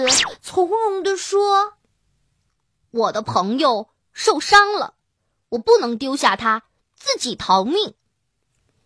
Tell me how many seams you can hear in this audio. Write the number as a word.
zero